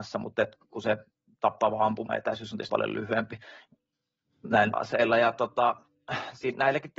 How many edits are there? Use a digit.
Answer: 3